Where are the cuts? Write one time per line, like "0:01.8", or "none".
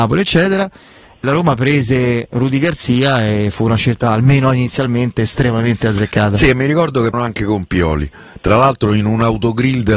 0:01.2
0:07.1

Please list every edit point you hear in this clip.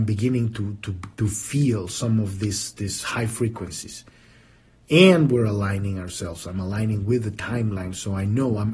none

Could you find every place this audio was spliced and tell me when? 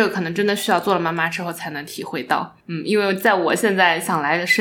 0:02.6

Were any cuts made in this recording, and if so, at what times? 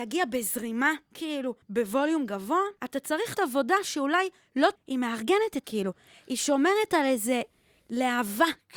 0:01.6
0:02.8
0:03.3
0:04.8
0:05.6

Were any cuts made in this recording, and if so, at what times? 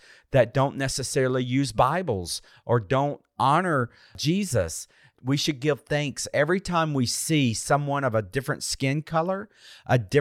none

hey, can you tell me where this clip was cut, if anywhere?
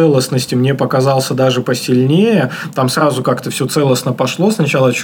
none

